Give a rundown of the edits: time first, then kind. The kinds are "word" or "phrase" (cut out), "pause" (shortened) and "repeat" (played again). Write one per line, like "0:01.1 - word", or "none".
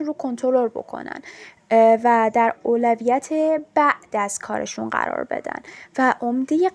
none